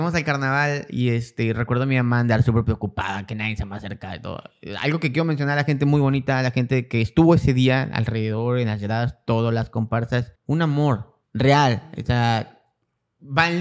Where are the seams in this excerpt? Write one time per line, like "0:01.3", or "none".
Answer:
0:10.4
0:11.2

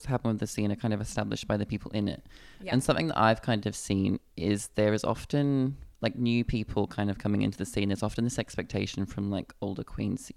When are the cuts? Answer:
0:05.9

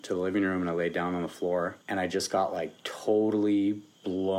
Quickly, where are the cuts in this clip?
0:01.8

